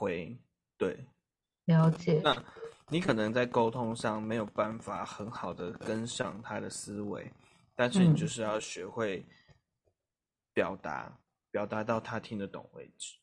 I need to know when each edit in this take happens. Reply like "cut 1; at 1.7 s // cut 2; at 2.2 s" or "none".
none